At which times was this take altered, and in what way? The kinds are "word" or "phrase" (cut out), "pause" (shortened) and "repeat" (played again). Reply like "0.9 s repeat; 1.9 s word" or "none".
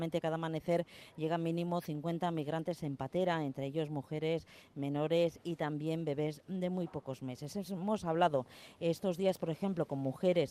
none